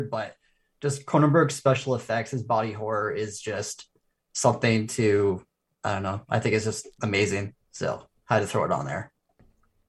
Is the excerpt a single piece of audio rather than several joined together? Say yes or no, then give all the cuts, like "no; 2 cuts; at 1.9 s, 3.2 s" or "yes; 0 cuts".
yes; 0 cuts